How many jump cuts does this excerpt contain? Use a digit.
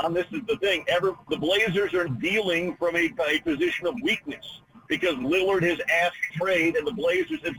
3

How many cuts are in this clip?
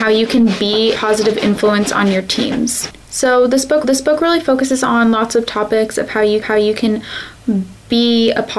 3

